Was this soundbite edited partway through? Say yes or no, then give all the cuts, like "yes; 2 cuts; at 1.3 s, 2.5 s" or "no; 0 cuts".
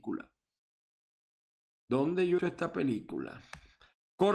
yes; 1 cut; at 2.4 s